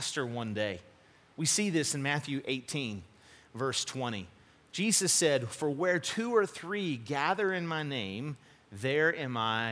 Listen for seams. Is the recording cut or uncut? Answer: uncut